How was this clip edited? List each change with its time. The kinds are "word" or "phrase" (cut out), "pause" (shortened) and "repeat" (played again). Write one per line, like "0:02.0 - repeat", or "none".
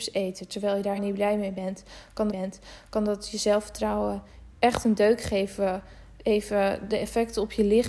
0:01.0 - word
0:02.3 - repeat
0:04.6 - pause